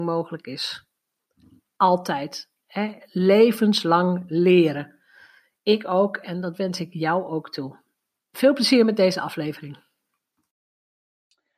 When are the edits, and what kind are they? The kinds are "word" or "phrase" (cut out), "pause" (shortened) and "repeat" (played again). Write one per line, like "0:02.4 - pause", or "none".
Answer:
none